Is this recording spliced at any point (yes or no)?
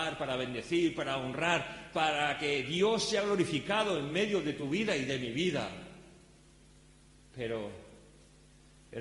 no